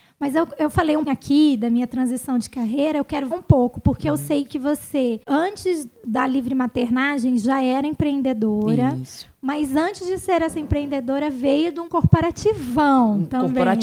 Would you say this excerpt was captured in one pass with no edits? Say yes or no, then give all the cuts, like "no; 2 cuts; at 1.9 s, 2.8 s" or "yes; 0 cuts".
no; 4 cuts; at 1.1 s, 3.3 s, 5.2 s, 11.9 s